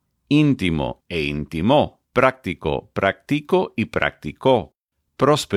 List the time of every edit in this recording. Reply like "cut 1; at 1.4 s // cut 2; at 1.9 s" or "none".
cut 1; at 1.0 s // cut 2; at 2.0 s